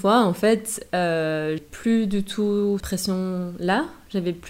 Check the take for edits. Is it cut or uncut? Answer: cut